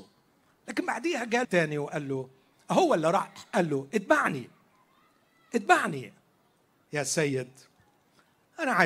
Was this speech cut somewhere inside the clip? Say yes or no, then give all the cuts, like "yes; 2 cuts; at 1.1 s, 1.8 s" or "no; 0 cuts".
yes; 2 cuts; at 1.4 s, 6.7 s